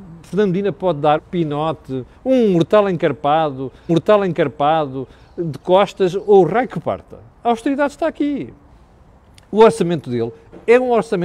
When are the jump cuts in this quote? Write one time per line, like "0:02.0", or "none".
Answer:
0:01.2
0:02.1
0:03.9
0:07.3